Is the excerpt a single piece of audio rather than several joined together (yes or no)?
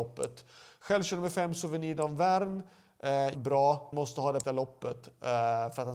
no